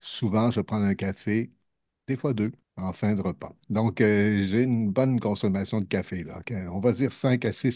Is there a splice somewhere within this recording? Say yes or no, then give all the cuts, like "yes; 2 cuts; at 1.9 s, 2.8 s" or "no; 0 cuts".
yes; 1 cut; at 2.6 s